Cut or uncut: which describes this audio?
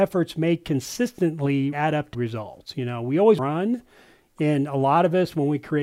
cut